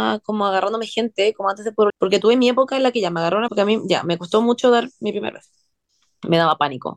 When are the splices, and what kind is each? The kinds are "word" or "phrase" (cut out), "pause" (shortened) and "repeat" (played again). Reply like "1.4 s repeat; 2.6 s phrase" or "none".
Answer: 1.9 s word; 3.5 s word